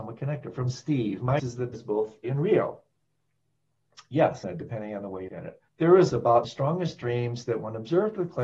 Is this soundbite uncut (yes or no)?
no